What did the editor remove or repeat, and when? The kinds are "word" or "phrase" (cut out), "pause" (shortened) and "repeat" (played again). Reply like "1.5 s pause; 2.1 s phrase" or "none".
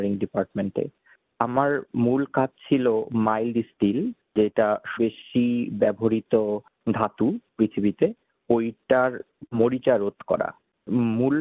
5.0 s word